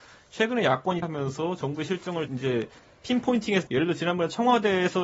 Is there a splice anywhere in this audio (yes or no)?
yes